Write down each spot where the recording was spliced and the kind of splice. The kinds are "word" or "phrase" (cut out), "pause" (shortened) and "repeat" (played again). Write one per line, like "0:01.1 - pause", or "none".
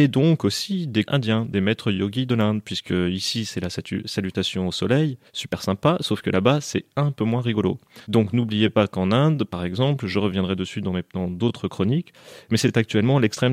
0:01.1 - phrase
0:05.3 - pause
0:08.0 - pause